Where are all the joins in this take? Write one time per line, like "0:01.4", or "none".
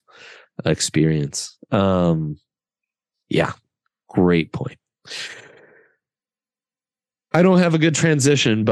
none